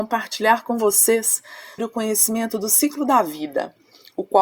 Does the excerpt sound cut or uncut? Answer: cut